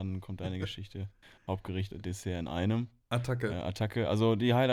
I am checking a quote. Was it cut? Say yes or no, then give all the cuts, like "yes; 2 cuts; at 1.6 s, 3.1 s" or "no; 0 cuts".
yes; 1 cut; at 1.9 s